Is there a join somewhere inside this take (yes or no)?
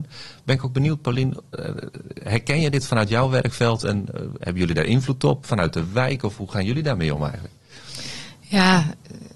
no